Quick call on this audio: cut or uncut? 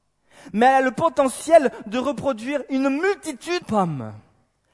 cut